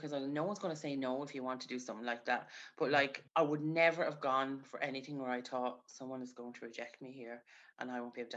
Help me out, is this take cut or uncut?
cut